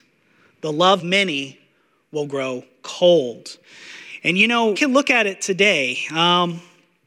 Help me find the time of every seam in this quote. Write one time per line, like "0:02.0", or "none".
0:01.0
0:04.7